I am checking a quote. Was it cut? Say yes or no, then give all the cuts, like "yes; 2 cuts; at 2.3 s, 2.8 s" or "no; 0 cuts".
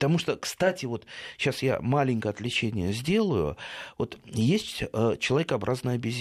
no; 0 cuts